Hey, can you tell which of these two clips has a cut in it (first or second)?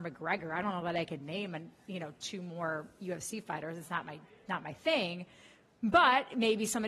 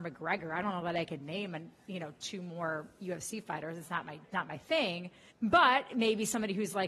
second